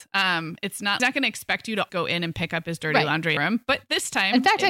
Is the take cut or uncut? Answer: cut